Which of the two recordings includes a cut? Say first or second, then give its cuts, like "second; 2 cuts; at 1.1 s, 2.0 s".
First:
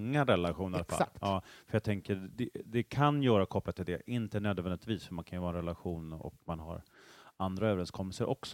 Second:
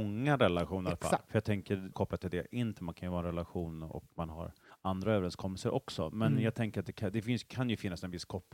second; 4 cuts; at 1.3 s, 1.9 s, 2.8 s, 4.7 s